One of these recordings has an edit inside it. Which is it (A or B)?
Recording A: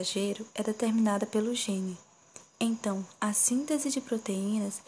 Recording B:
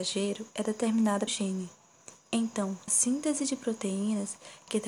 B